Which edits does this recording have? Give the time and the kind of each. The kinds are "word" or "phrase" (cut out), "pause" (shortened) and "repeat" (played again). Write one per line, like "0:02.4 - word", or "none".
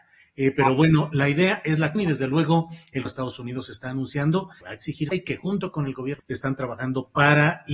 0:01.9 - word
0:03.0 - word
0:04.6 - word
0:05.1 - word
0:06.2 - word